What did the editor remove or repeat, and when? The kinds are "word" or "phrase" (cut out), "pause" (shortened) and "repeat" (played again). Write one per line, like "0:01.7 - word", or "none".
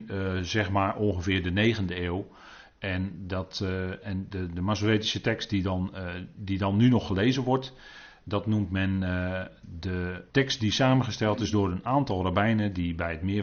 0:10.3 - pause